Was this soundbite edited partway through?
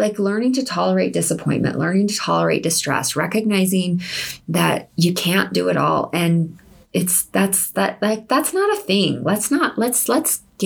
no; 0 cuts

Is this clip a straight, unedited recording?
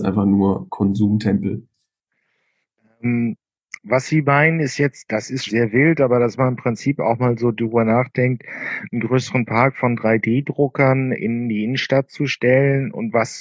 no; 2 cuts; at 5.5 s, 11.1 s

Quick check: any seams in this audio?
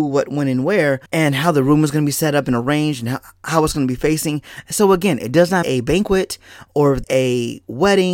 yes; 3 cuts; at 1.1 s, 5.6 s, 7.0 s

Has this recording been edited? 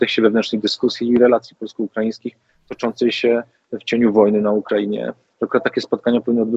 no; 0 cuts

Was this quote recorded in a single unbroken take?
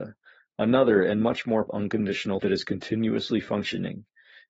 no; 2 cuts; at 1.7 s, 2.4 s

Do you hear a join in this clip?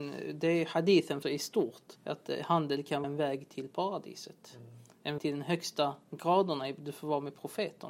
yes; 4 cuts; at 1.2 s, 2.0 s, 3.0 s, 5.2 s

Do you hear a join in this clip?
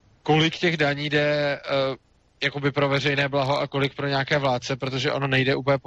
no; 0 cuts

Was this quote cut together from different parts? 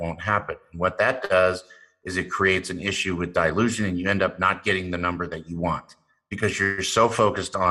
no; 0 cuts

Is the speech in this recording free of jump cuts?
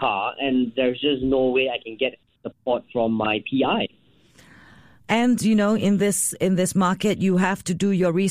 yes; 0 cuts

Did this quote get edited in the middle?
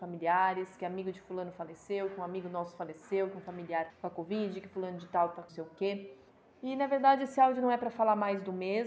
yes; 3 cuts; at 3.9 s, 5.5 s, 6.3 s

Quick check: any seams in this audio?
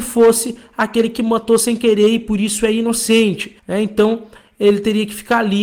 yes; 1 cut; at 3.6 s

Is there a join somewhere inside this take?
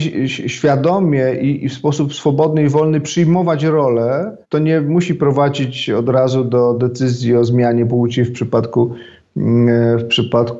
yes; 1 cut; at 4.4 s

